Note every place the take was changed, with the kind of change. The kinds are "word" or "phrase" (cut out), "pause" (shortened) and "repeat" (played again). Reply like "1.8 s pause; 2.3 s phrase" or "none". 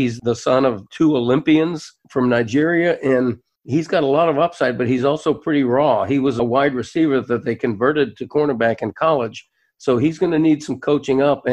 none